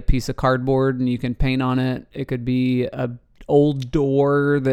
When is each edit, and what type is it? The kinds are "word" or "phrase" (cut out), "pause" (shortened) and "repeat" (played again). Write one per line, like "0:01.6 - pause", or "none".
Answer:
none